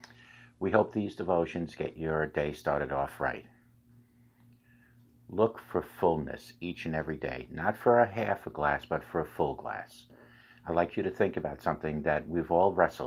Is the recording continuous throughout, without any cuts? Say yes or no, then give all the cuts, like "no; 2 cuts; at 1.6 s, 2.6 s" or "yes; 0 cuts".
yes; 0 cuts